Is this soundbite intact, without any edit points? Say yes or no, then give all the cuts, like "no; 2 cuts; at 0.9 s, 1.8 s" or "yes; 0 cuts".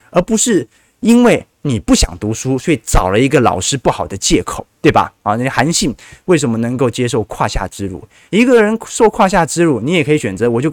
yes; 0 cuts